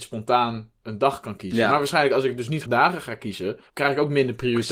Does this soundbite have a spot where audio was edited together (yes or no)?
yes